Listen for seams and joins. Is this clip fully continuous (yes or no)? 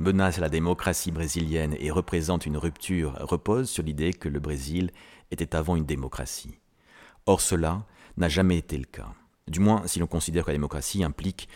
yes